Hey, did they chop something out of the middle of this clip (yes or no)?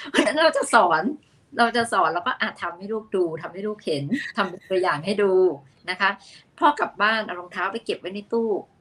no